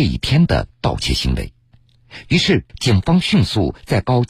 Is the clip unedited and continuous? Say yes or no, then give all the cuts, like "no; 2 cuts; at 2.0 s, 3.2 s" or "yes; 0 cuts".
no; 1 cut; at 2.7 s